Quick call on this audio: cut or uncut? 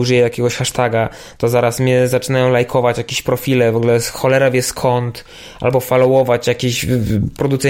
uncut